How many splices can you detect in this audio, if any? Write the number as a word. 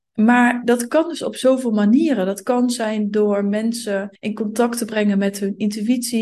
one